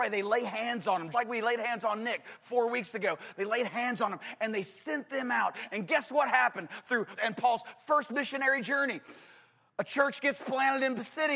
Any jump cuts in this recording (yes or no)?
yes